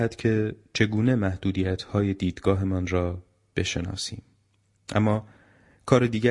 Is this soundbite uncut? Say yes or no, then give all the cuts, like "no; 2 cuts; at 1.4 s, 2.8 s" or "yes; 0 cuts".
yes; 0 cuts